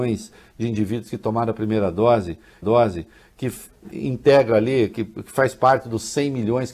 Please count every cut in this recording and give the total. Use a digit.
1